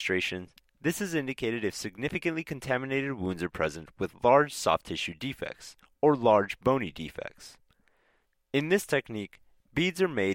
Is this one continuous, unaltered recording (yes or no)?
yes